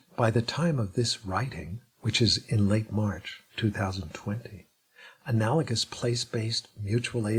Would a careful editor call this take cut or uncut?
cut